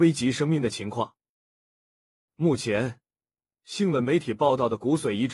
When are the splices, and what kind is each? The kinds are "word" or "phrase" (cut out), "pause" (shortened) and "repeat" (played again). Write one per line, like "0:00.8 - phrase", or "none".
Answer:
none